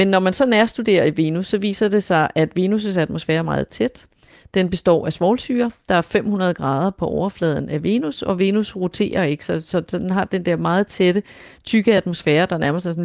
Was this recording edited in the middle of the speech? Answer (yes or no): no